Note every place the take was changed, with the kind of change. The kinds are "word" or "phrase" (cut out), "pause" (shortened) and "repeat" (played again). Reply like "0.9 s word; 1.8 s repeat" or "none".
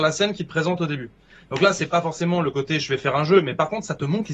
none